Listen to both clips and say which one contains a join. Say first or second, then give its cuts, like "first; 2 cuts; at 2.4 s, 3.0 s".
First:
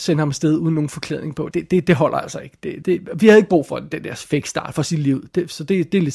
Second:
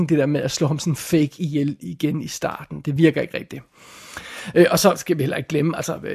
first; 2 cuts; at 1.5 s, 2.8 s